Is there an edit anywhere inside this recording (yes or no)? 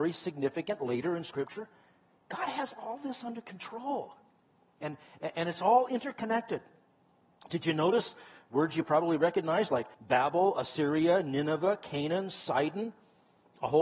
yes